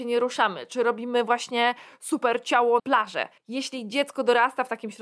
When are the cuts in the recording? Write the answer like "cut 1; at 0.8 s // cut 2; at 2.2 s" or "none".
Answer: cut 1; at 2.8 s // cut 2; at 3.4 s